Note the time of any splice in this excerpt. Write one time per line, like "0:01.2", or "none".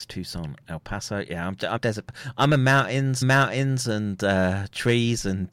0:01.8
0:03.2